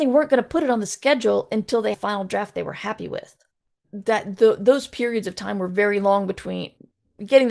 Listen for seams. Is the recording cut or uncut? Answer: cut